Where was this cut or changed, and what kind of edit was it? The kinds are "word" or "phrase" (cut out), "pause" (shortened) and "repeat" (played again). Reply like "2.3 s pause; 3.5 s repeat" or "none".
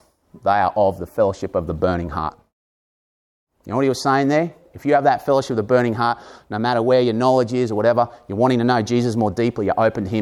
none